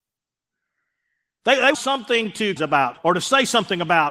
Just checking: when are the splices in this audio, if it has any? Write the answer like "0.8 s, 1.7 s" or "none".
1.7 s, 2.6 s, 2.9 s